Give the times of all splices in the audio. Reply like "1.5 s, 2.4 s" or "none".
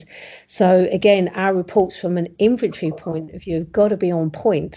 none